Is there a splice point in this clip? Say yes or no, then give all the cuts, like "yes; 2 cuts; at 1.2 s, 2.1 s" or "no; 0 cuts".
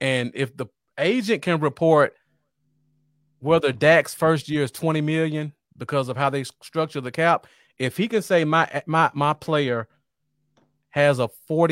no; 0 cuts